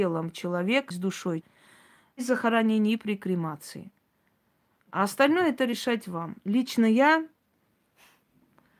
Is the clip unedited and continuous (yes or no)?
no